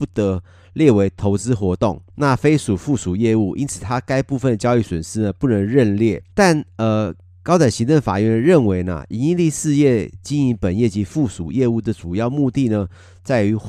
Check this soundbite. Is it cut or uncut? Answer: cut